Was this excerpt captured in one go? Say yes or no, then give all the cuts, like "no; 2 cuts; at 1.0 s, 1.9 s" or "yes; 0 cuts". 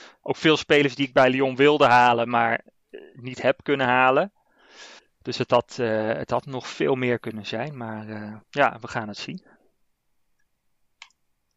no; 2 cuts; at 5.0 s, 8.4 s